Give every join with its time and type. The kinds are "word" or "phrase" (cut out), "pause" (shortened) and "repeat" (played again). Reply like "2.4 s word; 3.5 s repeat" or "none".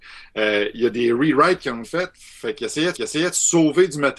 1.8 s word; 2.9 s repeat